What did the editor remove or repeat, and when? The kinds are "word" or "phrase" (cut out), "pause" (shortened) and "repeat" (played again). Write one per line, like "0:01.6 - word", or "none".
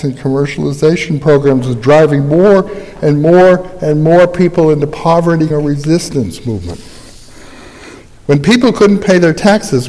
0:05.5 - word